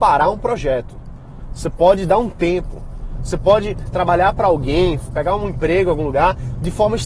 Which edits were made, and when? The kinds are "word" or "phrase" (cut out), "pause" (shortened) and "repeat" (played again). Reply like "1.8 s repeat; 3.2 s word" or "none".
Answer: 3.9 s phrase